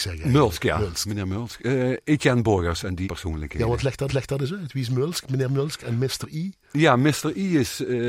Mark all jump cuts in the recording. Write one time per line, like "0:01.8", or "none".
0:03.0
0:04.1